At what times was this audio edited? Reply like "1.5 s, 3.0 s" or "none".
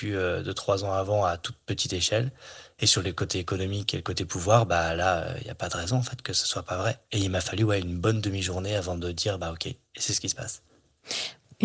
7.0 s, 9.8 s